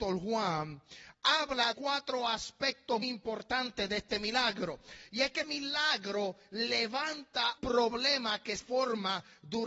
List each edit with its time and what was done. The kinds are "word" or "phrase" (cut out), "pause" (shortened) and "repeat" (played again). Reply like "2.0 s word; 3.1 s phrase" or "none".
1.7 s word; 3.0 s word; 5.4 s word; 7.6 s word; 8.6 s word